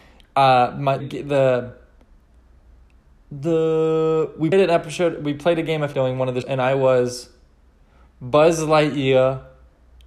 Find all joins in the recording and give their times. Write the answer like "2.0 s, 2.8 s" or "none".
1.0 s, 4.5 s, 5.9 s, 6.4 s

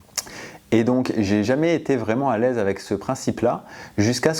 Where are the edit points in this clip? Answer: none

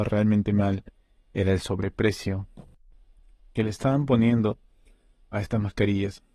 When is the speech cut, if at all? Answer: none

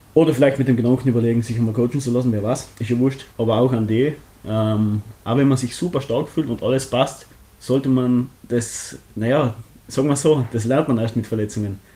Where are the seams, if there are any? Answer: 2.7 s, 3.3 s, 7.3 s, 8.4 s

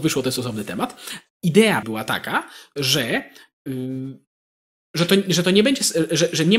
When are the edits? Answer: 1.3 s, 1.8 s

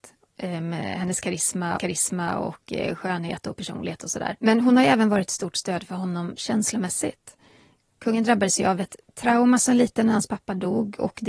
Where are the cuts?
1.8 s, 4.4 s, 6.4 s

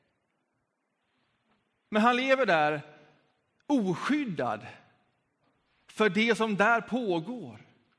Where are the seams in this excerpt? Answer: none

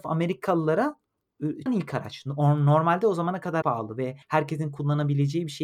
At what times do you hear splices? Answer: 1.7 s, 3.6 s, 4.2 s

